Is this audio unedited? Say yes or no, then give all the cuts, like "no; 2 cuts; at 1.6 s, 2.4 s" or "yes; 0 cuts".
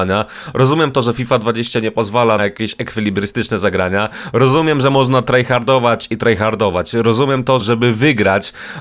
no; 2 cuts; at 2.4 s, 7.6 s